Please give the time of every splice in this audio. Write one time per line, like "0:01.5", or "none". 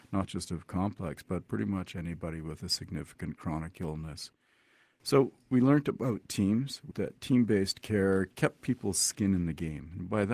0:01.2
0:06.9